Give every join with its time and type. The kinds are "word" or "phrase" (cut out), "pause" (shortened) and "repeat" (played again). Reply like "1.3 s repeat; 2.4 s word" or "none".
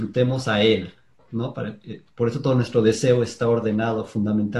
none